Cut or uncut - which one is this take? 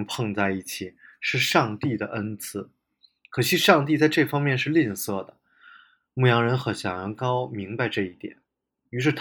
uncut